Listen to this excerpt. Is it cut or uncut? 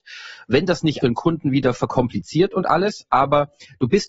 cut